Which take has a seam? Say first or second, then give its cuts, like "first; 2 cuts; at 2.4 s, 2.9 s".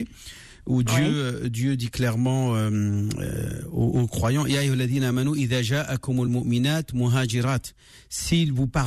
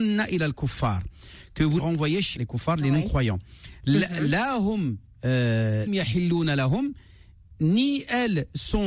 second; 3 cuts; at 1.8 s, 2.4 s, 5.9 s